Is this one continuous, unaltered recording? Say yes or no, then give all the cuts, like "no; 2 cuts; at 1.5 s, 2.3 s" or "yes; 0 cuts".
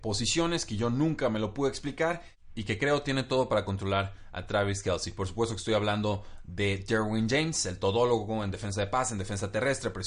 yes; 0 cuts